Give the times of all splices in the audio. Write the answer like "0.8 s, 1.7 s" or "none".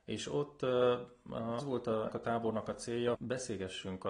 1.6 s, 2.1 s, 3.1 s